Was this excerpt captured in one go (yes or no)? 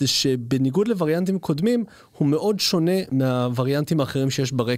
yes